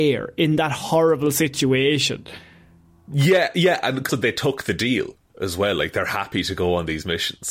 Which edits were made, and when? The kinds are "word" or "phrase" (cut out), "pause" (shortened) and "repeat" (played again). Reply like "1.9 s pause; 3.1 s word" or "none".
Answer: 4.1 s word

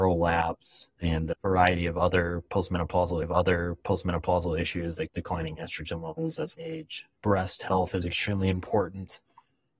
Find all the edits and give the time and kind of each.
3.2 s repeat; 5.1 s phrase; 6.5 s word; 7.1 s pause; 8.0 s word

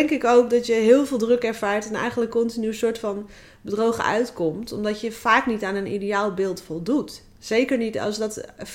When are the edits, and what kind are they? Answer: none

